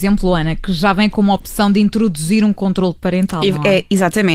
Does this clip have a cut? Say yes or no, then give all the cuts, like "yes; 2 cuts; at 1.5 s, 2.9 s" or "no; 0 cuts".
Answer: no; 0 cuts